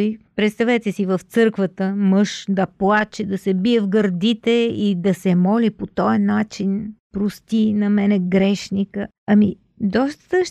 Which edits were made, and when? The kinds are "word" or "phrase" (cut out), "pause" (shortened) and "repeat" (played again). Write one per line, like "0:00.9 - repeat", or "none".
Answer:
none